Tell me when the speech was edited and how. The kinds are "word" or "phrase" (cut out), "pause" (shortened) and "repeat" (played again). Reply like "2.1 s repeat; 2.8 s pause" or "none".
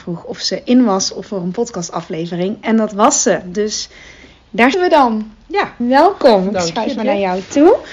4.7 s word; 5.8 s word; 7.0 s word